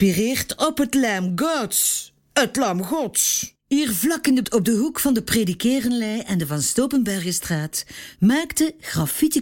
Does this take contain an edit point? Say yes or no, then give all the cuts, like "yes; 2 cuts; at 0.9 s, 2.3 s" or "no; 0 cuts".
yes; 2 cuts; at 3.6 s, 4.4 s